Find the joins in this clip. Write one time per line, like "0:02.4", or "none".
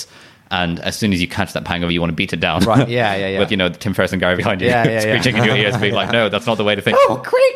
0:01.9
0:03.5
0:04.4